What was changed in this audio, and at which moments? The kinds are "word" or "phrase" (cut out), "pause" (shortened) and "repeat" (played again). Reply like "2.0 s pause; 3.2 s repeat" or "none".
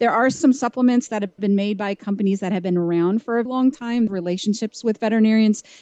3.5 s word; 4.1 s phrase